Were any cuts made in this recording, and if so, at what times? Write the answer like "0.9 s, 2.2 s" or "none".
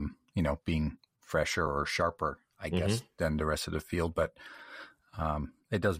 none